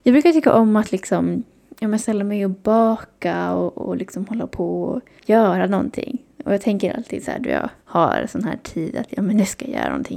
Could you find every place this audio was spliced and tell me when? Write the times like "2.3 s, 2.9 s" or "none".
5.2 s, 7.8 s